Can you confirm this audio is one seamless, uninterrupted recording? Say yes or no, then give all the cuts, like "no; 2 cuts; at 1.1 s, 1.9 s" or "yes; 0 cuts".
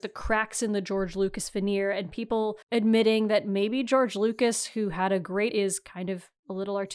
no; 2 cuts; at 2.6 s, 5.5 s